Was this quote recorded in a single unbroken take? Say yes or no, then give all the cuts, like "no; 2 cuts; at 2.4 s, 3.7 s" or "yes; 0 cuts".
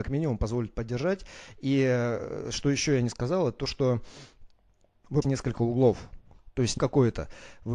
no; 2 cuts; at 5.2 s, 6.8 s